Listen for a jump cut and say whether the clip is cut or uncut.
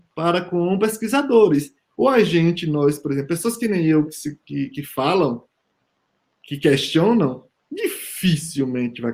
uncut